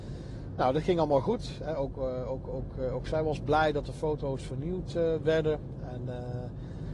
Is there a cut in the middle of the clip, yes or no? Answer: no